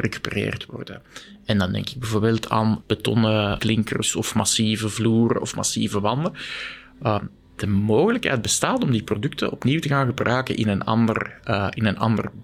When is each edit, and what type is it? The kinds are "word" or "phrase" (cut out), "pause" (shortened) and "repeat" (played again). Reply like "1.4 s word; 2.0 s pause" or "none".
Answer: 2.8 s word; 3.6 s word